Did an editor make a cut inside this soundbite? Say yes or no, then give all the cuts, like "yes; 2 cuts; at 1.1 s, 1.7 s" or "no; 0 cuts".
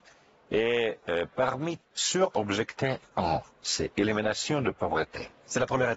yes; 1 cut; at 1.8 s